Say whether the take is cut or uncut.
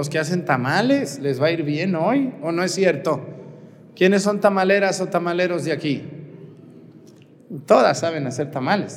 uncut